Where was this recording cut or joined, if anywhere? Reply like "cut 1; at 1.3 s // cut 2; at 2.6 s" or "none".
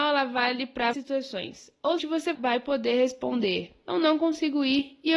cut 1; at 0.9 s // cut 2; at 2.0 s // cut 3; at 2.3 s